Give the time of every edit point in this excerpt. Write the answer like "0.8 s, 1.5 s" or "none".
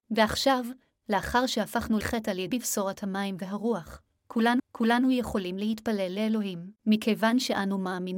2.0 s, 2.5 s, 4.6 s, 6.8 s